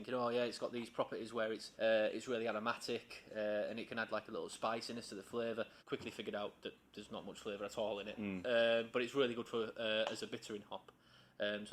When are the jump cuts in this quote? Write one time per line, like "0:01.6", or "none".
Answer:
0:01.7
0:05.8